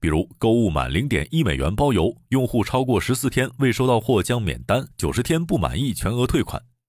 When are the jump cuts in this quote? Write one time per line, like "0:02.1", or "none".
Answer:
0:04.9